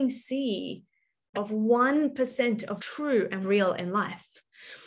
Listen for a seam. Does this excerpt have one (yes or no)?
yes